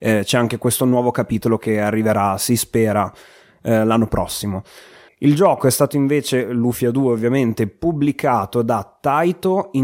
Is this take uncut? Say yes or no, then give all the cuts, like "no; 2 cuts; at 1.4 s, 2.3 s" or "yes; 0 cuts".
no; 1 cut; at 5.1 s